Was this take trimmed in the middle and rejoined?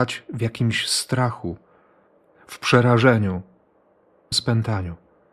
yes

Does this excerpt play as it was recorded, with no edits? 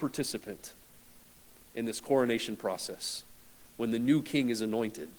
yes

